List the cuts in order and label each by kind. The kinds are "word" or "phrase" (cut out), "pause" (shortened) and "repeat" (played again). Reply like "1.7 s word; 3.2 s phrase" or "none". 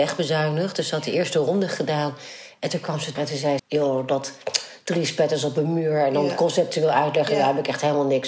3.2 s word; 3.6 s word